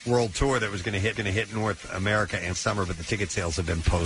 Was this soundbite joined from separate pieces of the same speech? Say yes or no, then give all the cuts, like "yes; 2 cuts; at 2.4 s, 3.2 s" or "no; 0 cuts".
yes; 2 cuts; at 1.2 s, 2.5 s